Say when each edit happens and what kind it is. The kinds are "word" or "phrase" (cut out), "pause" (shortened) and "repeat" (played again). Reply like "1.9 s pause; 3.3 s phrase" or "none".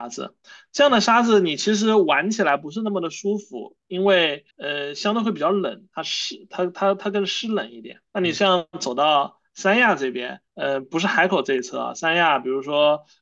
4.5 s pause; 8.1 s pause; 10.5 s pause